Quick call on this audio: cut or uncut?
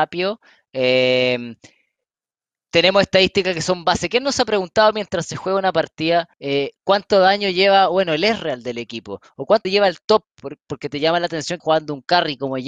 cut